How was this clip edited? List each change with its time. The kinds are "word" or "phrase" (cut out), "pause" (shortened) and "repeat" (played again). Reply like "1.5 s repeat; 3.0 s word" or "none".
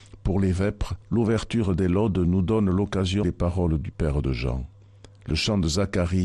1.0 s pause; 3.2 s word

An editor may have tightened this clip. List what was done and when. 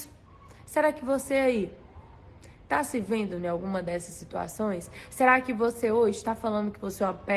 none

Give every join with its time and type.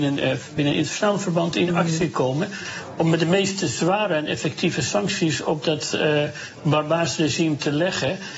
none

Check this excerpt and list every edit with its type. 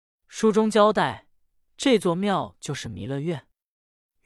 none

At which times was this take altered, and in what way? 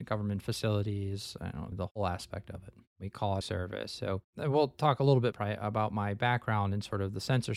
1.7 s word; 3.4 s phrase; 5.3 s word

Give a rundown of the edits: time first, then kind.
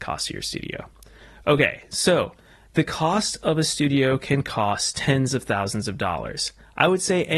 none

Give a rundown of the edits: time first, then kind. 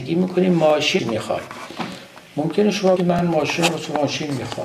1.0 s phrase; 2.3 s pause; 3.0 s word

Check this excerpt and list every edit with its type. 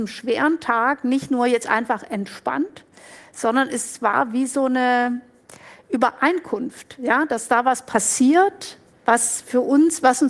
none

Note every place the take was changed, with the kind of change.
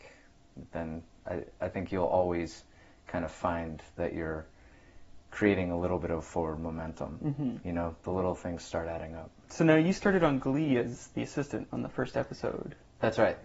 none

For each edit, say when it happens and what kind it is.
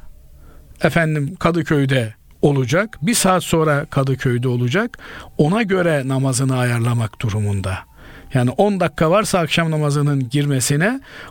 2.3 s pause

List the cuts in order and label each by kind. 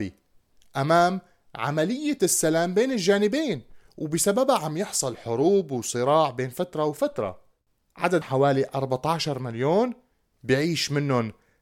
8.2 s phrase

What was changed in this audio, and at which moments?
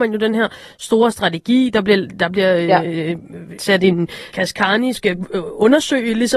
3.6 s word; 4.3 s word; 4.9 s phrase

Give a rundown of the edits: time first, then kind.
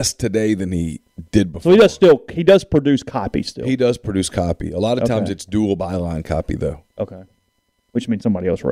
6.9 s pause

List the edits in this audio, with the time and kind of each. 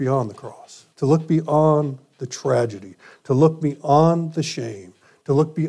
0.9 s pause

